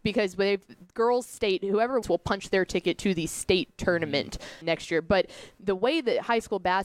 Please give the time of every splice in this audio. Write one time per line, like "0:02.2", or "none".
0:02.0
0:04.6